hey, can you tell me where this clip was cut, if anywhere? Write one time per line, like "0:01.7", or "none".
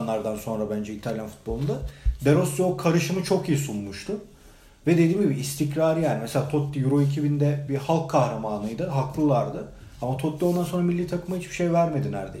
none